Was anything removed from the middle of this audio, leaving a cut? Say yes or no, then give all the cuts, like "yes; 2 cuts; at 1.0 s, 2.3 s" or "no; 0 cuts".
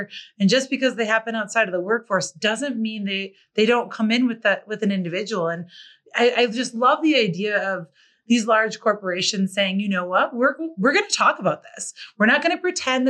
no; 0 cuts